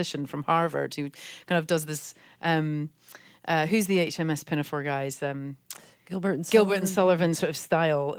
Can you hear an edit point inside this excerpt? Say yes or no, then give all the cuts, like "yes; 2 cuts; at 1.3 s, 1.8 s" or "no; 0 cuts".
no; 0 cuts